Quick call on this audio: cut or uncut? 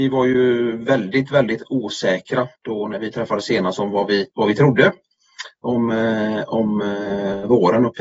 cut